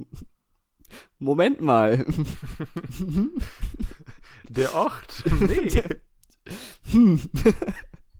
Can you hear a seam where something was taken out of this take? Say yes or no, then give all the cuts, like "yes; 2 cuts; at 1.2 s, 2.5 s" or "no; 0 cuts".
no; 0 cuts